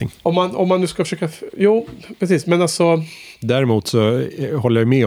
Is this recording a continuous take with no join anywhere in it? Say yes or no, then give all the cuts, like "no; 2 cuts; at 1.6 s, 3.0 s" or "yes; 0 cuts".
no; 1 cut; at 3.4 s